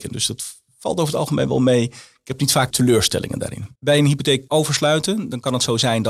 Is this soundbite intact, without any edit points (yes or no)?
no